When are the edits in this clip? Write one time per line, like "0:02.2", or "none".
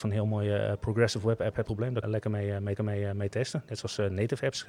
0:01.7
0:02.0
0:02.8

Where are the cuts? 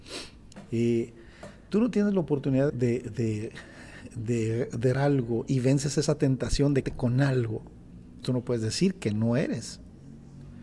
0:01.7
0:02.7
0:04.9
0:06.8
0:08.2

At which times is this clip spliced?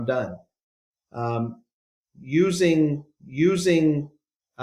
0:03.2

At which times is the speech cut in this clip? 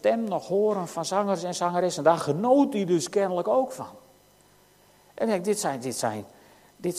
none

